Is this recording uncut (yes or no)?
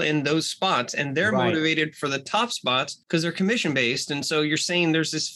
no